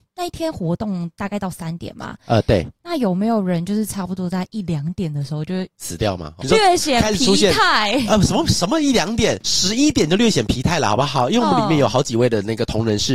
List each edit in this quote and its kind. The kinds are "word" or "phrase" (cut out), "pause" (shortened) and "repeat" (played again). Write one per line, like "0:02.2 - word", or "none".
0:06.4 - word